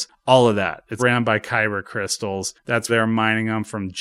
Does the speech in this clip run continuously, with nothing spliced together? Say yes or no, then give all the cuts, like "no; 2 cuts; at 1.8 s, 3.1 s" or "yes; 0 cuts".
no; 2 cuts; at 1.0 s, 2.9 s